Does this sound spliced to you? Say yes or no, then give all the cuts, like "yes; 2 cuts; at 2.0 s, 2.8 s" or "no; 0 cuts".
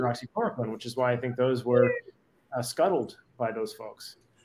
no; 0 cuts